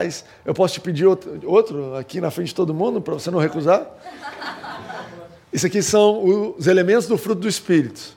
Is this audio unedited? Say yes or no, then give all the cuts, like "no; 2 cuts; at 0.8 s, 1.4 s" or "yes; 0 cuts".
yes; 0 cuts